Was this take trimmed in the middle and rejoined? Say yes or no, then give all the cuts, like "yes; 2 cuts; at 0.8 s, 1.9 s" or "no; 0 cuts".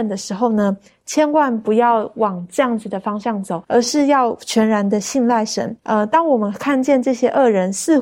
yes; 2 cuts; at 3.6 s, 5.8 s